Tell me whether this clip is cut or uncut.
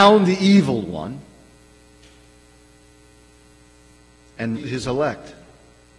cut